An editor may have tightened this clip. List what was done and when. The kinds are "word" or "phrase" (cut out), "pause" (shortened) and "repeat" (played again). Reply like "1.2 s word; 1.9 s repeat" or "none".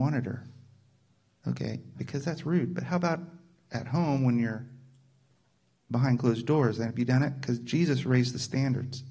1.9 s word